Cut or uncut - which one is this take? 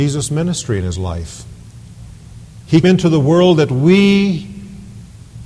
cut